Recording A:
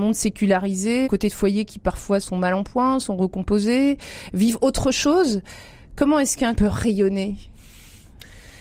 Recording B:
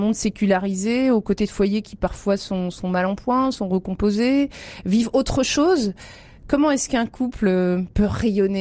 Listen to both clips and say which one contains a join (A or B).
A